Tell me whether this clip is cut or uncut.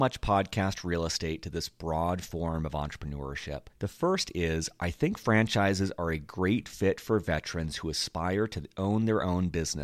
cut